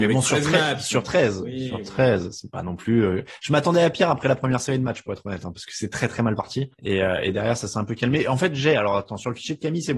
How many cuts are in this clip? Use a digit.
1